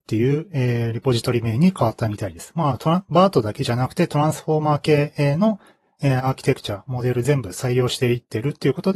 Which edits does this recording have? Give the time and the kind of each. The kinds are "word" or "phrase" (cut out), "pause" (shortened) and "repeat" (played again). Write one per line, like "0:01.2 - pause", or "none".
none